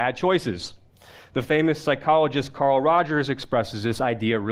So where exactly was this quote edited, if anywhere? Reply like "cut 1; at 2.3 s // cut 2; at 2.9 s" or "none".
none